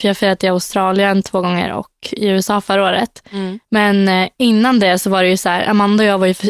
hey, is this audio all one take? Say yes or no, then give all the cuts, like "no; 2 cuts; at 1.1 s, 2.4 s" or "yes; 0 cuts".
yes; 0 cuts